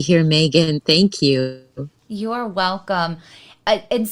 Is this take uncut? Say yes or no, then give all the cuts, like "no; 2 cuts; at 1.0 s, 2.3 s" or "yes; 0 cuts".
no; 1 cut; at 2.0 s